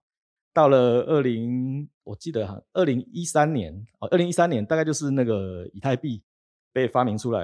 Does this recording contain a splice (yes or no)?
yes